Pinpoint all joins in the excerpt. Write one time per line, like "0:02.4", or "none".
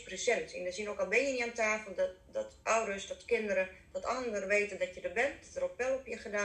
0:02.6